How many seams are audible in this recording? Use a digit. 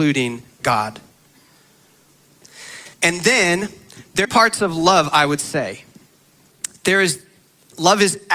2